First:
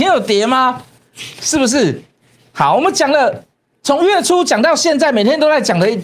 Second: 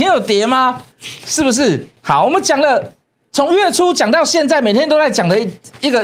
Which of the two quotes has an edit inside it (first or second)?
second